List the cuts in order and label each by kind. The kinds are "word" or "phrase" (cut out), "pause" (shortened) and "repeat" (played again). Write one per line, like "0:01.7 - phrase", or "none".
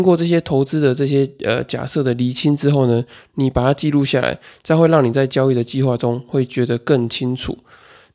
none